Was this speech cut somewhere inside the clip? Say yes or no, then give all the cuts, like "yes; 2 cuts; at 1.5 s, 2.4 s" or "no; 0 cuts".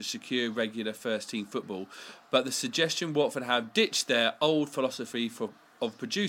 no; 0 cuts